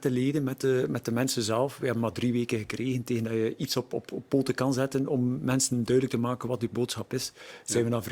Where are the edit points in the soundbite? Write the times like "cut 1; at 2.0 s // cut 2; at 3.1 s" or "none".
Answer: none